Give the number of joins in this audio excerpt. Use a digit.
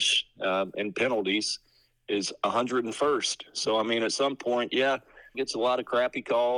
1